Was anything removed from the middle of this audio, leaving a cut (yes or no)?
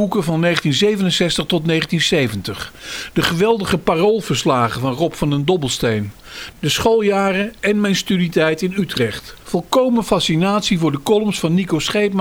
no